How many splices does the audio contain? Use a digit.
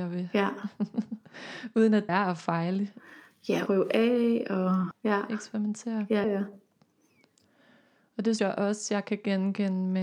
5